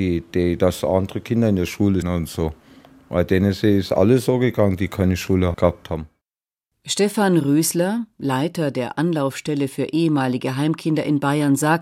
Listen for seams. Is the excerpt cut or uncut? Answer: cut